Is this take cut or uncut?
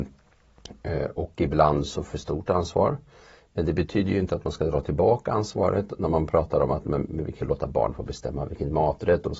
cut